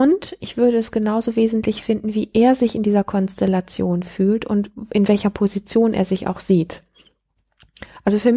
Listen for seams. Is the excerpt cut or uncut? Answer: uncut